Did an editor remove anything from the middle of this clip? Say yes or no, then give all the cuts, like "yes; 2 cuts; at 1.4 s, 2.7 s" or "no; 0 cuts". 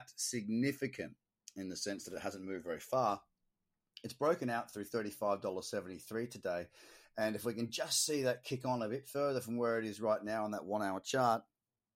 no; 0 cuts